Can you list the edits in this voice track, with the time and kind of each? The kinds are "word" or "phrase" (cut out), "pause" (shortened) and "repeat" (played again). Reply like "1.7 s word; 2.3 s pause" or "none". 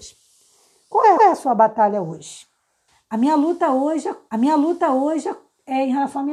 1.2 s repeat; 2.9 s pause; 4.3 s repeat